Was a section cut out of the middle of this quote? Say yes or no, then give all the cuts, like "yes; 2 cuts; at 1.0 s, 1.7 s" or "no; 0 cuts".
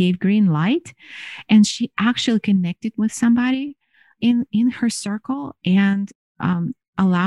no; 0 cuts